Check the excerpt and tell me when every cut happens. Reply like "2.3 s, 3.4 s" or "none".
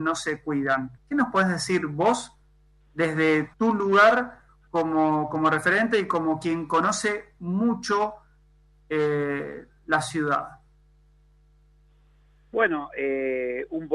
1.0 s, 3.5 s